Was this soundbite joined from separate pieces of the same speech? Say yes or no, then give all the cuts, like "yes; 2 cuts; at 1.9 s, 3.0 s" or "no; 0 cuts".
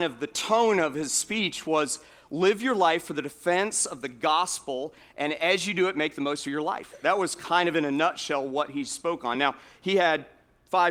no; 0 cuts